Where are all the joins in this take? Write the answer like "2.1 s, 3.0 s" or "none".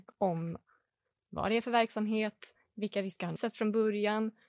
3.4 s